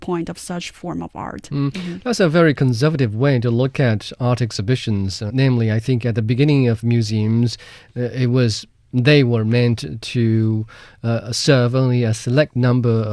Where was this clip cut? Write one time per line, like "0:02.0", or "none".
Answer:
0:05.3